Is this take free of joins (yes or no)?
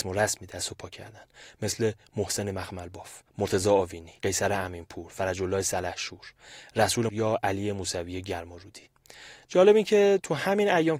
no